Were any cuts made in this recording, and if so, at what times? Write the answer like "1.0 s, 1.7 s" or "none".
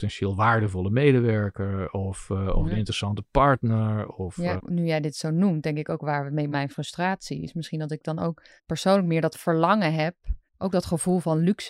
4.6 s, 6.5 s, 8.6 s, 10.5 s